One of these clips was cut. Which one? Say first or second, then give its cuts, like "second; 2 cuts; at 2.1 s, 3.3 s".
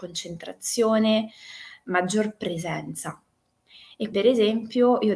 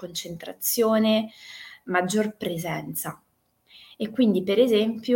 first; 1 cut; at 4.1 s